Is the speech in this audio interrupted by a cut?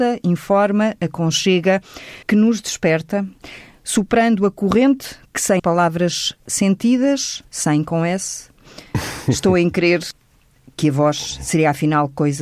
yes; 2 cuts; at 2.2 s, 5.6 s

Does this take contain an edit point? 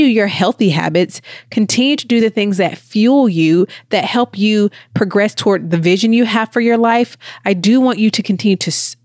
no; 0 cuts

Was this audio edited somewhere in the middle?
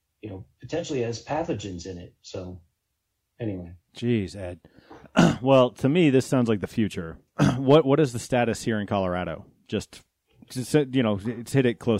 no; 0 cuts

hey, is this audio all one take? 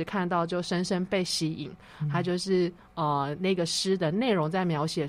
yes; 0 cuts

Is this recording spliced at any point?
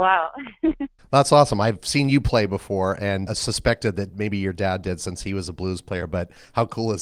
yes; 2 cuts; at 1.0 s, 3.3 s

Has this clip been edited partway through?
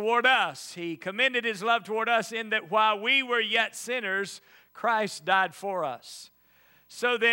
no; 0 cuts

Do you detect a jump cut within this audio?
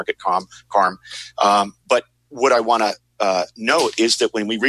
no; 0 cuts

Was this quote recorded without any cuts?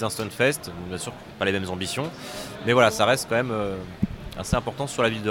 yes; 0 cuts

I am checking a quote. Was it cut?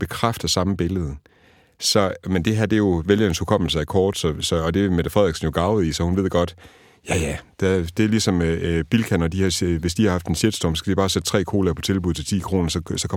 no; 0 cuts

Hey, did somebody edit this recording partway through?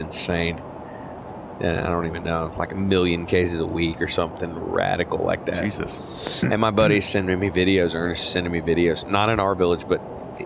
no; 0 cuts

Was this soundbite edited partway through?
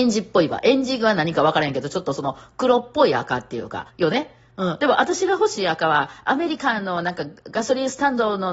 yes; 1 cut; at 3.9 s

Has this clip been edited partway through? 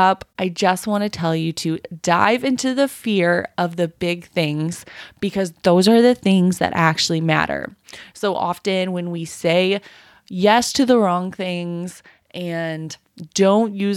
no; 0 cuts

